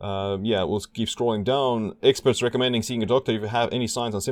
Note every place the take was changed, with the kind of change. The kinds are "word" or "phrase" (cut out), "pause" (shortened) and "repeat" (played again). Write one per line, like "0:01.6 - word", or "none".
none